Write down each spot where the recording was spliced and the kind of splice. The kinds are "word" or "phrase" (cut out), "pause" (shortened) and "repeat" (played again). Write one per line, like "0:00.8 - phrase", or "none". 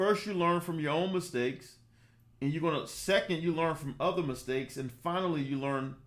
none